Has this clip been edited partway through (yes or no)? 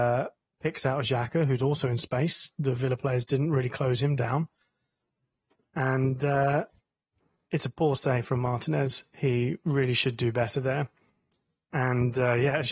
no